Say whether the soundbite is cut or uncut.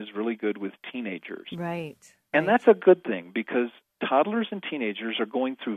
uncut